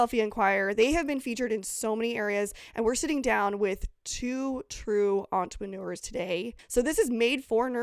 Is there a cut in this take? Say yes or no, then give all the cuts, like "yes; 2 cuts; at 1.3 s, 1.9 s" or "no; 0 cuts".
no; 0 cuts